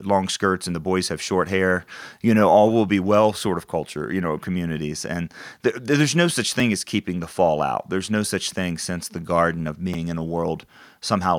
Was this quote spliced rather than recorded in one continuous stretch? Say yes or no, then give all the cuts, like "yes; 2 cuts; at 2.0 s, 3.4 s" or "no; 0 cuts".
no; 0 cuts